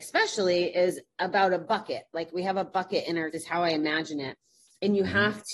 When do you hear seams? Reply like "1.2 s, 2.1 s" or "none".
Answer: 3.3 s

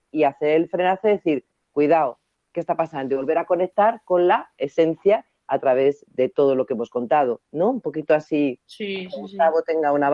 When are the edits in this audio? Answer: none

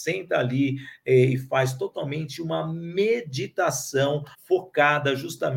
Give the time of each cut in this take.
4.3 s

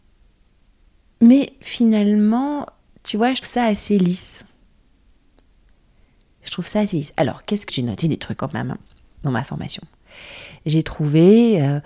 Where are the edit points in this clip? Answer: 3.4 s, 7.7 s, 8.4 s

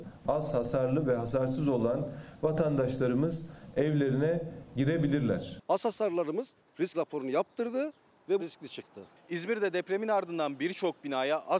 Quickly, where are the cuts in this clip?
6.9 s, 8.4 s

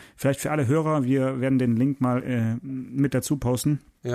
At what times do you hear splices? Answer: none

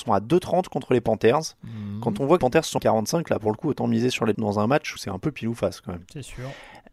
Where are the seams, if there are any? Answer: 2.4 s, 2.8 s, 4.3 s, 5.0 s

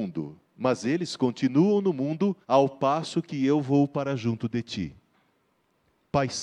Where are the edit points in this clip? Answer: 2.4 s

